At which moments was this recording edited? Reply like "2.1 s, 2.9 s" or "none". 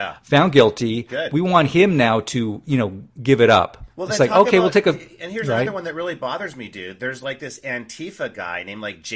none